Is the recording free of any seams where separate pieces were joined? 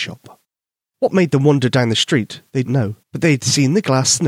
no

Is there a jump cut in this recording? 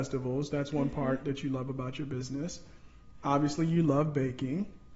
no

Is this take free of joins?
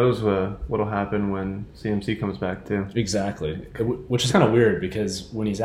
no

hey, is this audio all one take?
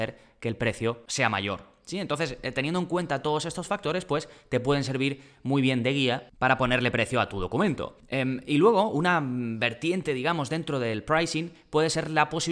yes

